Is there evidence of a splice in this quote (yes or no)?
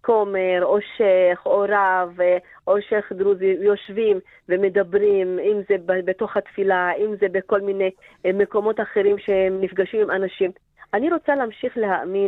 no